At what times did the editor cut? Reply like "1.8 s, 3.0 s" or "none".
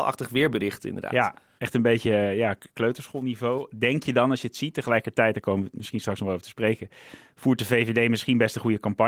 none